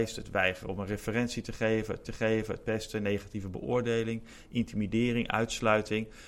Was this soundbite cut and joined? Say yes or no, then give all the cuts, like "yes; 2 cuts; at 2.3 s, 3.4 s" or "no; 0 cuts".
yes; 1 cut; at 2.0 s